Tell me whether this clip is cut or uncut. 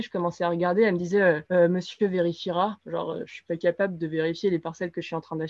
uncut